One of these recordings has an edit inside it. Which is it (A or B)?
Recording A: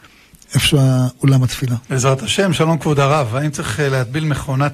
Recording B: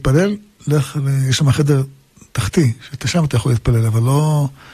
A